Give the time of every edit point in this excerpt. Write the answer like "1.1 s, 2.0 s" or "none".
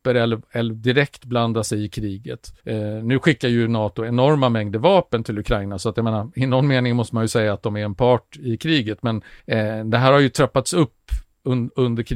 2.6 s, 9.4 s

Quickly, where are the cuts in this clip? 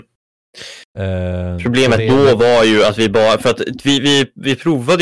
none

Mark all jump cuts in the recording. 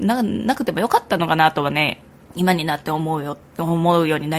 2.1 s

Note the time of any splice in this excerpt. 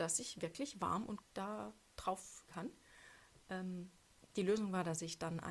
1.2 s, 2.5 s

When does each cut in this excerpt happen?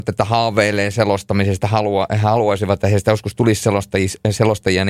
1.6 s

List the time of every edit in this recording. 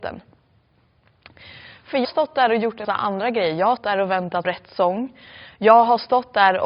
2.0 s, 2.8 s, 3.8 s, 4.4 s

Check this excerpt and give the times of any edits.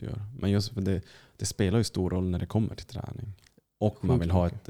none

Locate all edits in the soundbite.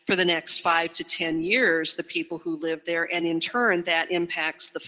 none

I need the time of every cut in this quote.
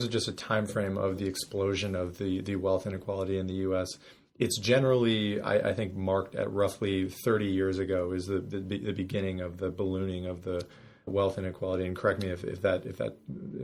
11.1 s

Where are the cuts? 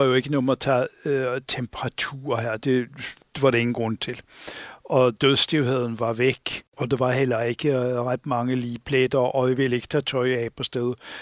none

